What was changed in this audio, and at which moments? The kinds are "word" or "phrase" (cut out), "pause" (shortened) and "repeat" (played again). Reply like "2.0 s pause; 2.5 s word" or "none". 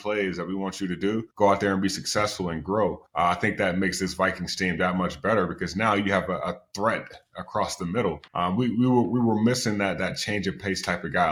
1.3 s pause; 3.1 s pause; 8.3 s pause